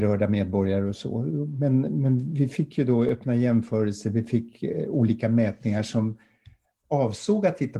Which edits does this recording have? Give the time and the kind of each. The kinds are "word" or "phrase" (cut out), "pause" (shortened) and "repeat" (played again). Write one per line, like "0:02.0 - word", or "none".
none

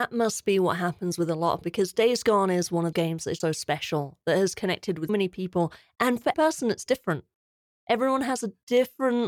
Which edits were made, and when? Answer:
0:01.6 - word
0:02.9 - word
0:03.4 - word
0:05.1 - word
0:06.3 - word

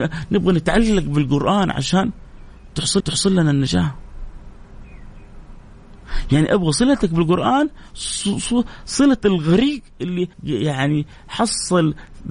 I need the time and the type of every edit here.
0:03.0 - repeat
0:10.3 - pause

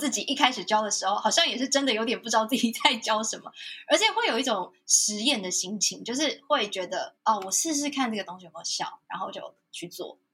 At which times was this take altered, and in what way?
0:07.2 - pause

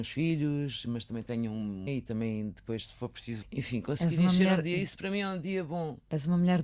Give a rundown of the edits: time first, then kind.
0:01.9 - word
0:03.4 - phrase

